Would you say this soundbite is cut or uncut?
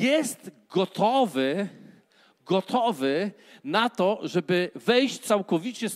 uncut